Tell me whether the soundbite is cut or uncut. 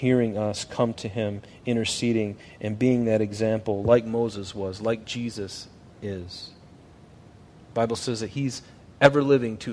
uncut